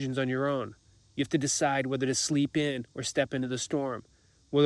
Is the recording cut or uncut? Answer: uncut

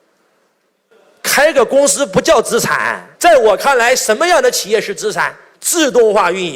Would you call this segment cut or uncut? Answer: cut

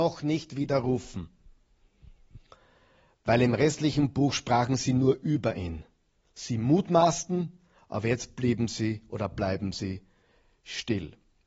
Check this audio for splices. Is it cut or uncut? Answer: uncut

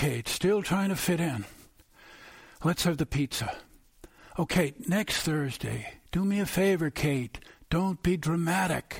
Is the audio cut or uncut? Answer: uncut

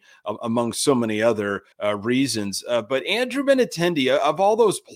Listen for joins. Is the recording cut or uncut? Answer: cut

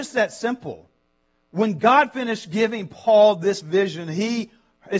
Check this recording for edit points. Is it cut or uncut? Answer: uncut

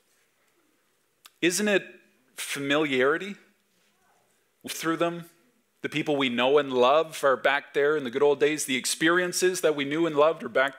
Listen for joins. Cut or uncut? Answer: cut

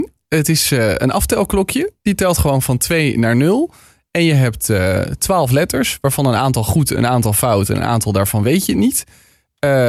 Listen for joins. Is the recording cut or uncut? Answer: uncut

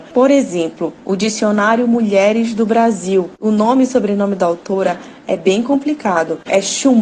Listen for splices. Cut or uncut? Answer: uncut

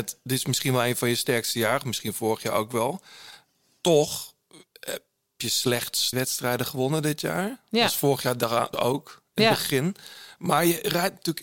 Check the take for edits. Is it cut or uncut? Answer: cut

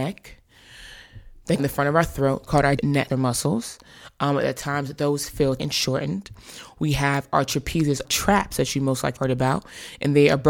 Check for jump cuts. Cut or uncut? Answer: cut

